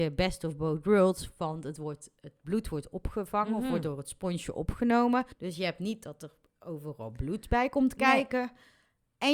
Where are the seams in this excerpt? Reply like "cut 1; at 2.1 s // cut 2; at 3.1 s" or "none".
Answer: cut 1; at 5.3 s